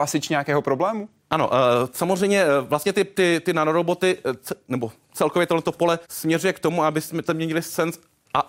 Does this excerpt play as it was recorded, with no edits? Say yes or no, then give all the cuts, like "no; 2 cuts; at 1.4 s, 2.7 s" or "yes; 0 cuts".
no; 1 cut; at 6.0 s